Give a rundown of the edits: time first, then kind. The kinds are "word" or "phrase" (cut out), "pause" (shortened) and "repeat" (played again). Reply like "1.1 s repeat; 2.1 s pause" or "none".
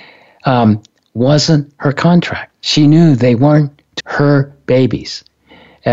2.6 s pause; 4.0 s word